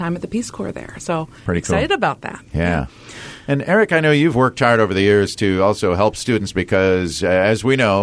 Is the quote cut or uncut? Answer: uncut